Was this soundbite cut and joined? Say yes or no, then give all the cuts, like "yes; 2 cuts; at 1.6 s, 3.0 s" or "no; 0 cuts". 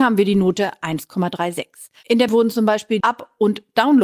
yes; 2 cuts; at 2.3 s, 3.0 s